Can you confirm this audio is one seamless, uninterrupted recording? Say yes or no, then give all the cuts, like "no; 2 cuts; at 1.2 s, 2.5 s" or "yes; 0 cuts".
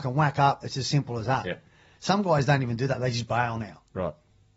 yes; 0 cuts